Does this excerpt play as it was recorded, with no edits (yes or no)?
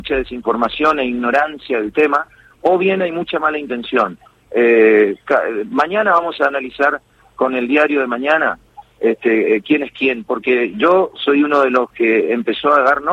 yes